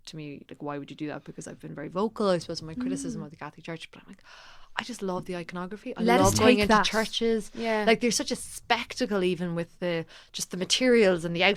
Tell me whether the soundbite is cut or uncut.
uncut